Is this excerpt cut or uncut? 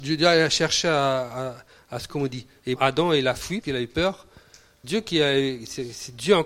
cut